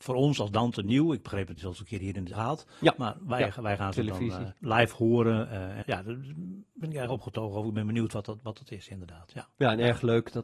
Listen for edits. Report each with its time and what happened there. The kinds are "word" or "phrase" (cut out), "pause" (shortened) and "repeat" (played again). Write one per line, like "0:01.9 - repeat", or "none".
0:01.6 - word
0:02.3 - phrase
0:04.6 - pause
0:05.8 - word

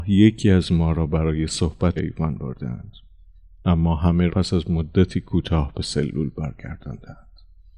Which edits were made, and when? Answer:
0:02.0 - word
0:04.3 - word

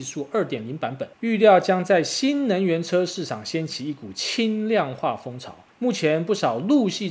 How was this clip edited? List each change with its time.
0:01.1 - pause

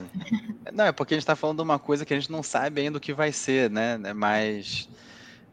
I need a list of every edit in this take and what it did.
none

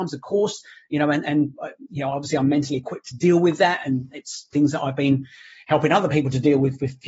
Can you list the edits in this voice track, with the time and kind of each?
none

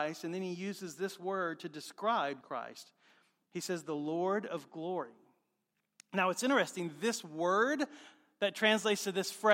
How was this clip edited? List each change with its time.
0:02.4 - word

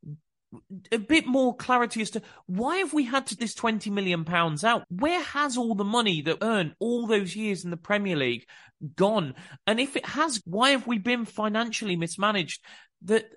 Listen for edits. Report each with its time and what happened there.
0:03.4 - word
0:04.8 - word
0:06.4 - word
0:06.8 - word
0:10.4 - word
0:11.3 - word

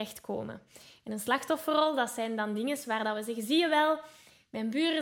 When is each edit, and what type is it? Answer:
none

